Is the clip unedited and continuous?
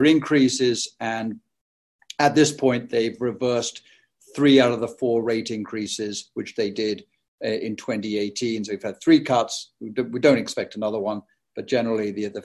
yes; 0 cuts

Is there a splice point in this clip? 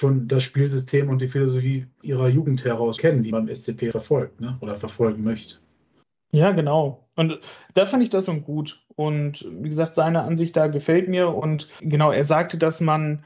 yes; 6 cuts; at 2.0 s, 3.0 s, 3.3 s, 3.9 s, 8.3 s, 11.8 s

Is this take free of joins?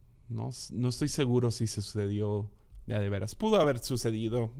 yes; 0 cuts

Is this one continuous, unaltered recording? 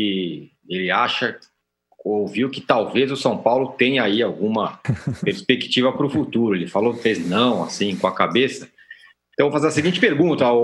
yes; 0 cuts

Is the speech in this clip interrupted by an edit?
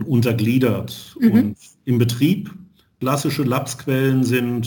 no; 0 cuts

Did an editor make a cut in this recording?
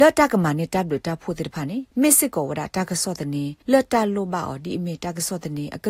yes; 2 cuts; at 1.9 s, 3.6 s

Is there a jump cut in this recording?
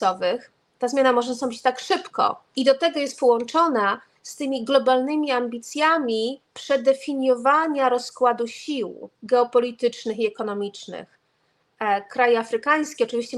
yes; 3 cuts; at 2.5 s, 6.5 s, 9.1 s

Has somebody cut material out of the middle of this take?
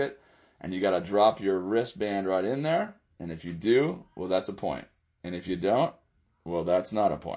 no; 0 cuts

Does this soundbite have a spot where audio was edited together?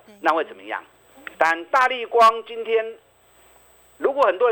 yes; 1 cut; at 1.3 s

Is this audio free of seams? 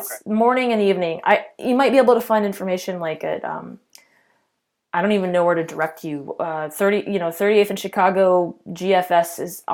yes; 0 cuts

